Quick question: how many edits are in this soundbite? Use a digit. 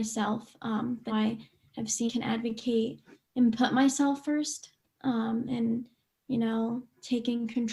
3